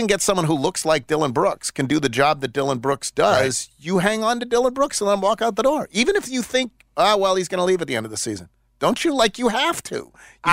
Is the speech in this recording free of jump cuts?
yes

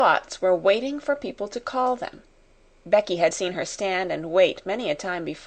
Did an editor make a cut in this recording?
no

